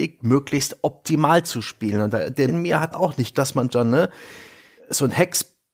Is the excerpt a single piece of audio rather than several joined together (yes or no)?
no